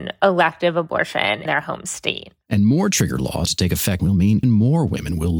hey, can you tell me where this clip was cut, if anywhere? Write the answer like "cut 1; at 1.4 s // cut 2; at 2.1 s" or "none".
cut 1; at 1.5 s // cut 2; at 3.5 s // cut 3; at 4.0 s // cut 4; at 4.4 s